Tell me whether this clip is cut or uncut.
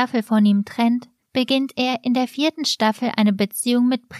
uncut